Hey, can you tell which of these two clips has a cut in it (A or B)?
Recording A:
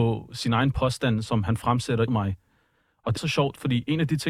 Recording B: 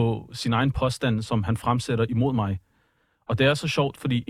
A